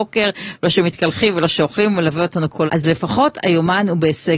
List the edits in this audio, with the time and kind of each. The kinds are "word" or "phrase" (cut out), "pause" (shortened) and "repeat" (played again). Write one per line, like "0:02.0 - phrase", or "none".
0:02.7 - word